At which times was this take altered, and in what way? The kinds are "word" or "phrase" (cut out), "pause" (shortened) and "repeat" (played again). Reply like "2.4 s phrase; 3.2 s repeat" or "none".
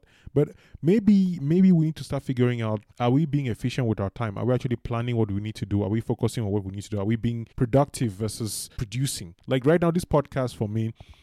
2.9 s pause; 7.5 s pause; 8.8 s word; 9.4 s pause